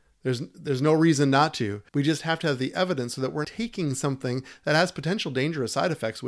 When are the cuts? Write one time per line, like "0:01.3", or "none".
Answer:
0:01.9
0:03.4